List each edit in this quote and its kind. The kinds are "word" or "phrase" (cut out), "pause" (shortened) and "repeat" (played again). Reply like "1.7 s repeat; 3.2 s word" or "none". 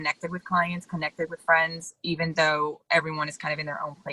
none